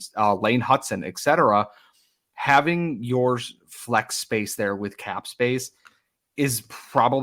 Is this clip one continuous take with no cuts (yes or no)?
yes